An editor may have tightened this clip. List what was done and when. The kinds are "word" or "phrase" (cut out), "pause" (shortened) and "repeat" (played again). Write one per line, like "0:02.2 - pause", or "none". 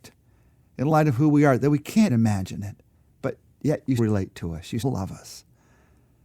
0:02.1 - word
0:04.0 - word
0:04.8 - word